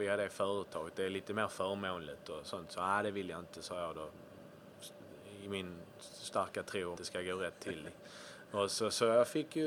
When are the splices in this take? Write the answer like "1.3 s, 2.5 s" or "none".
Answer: 7.0 s